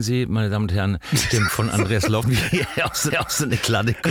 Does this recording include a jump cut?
yes; 3 cuts; at 1.5 s, 2.2 s, 3.1 s

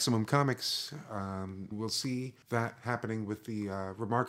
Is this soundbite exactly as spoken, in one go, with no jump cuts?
no; 2 cuts; at 1.7 s, 2.4 s

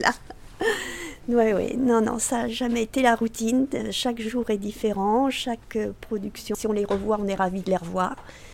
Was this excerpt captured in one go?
no; 1 cut; at 6.5 s

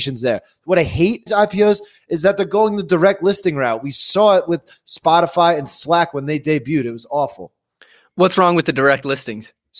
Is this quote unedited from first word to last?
no; 1 cut; at 1.3 s

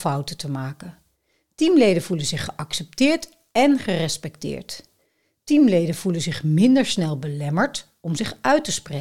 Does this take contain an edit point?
no; 0 cuts

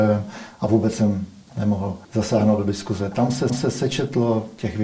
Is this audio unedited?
no; 2 cuts; at 2.0 s, 3.5 s

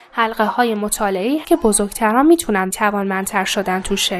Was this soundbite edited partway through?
yes; 2 cuts; at 1.4 s, 2.7 s

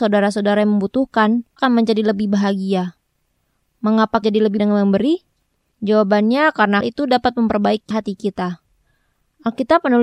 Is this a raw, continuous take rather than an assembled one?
no; 5 cuts; at 1.6 s, 4.2 s, 4.6 s, 6.8 s, 7.9 s

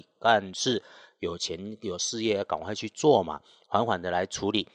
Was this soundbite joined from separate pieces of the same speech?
no; 0 cuts

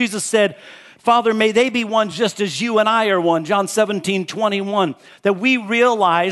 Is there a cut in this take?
no; 0 cuts

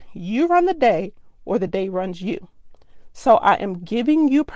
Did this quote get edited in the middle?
no; 0 cuts

